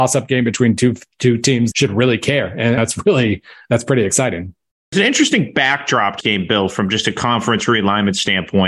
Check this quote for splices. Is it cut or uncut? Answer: cut